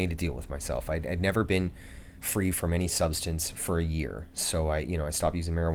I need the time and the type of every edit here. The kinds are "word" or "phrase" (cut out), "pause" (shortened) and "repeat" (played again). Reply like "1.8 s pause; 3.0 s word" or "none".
none